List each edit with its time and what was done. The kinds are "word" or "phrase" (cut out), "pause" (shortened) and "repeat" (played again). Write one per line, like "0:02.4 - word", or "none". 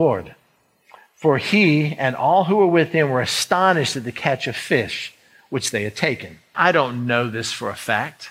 0:06.5 - word